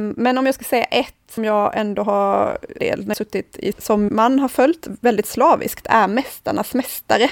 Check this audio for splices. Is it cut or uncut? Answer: cut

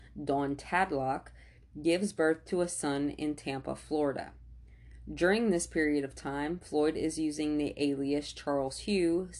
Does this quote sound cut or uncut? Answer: uncut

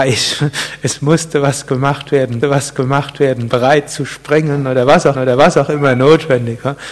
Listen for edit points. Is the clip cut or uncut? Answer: cut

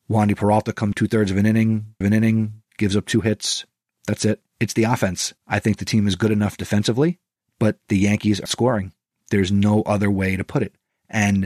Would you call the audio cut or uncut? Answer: cut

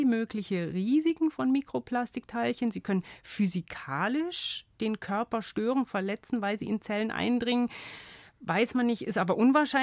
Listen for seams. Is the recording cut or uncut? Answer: uncut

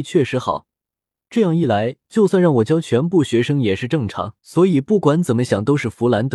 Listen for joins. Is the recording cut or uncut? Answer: cut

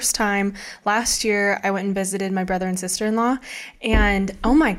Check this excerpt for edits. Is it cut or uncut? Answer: uncut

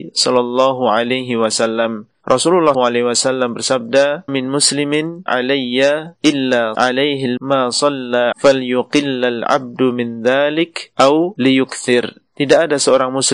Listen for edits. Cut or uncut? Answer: cut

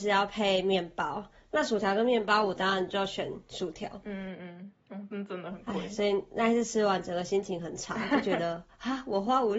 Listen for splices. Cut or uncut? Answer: uncut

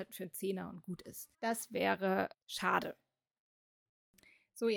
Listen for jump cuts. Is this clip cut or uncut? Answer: cut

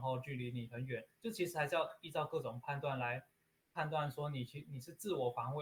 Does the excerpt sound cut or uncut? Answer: uncut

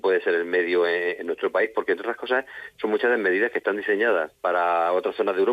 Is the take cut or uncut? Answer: cut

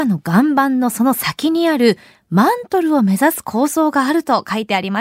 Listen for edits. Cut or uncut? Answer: uncut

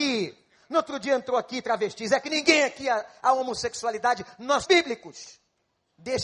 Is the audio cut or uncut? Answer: cut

